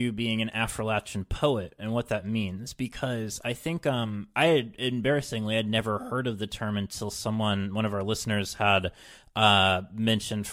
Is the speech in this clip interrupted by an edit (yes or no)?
no